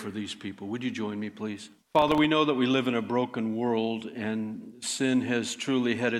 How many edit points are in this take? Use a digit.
1